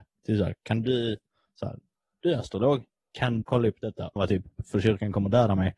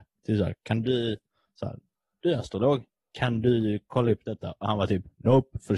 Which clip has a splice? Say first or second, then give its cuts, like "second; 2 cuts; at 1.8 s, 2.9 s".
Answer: first; 3 cuts; at 3.4 s, 4.2 s, 4.6 s